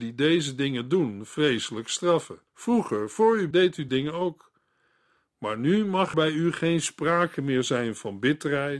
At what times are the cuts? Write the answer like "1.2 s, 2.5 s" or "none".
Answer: 2.5 s, 3.5 s, 3.9 s, 6.1 s